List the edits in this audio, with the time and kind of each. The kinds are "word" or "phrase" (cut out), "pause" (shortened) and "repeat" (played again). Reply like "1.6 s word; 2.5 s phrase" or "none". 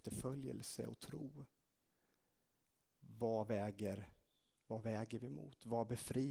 none